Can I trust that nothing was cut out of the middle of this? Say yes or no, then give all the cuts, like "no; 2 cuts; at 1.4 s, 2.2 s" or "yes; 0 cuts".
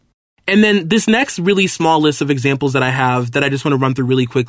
yes; 0 cuts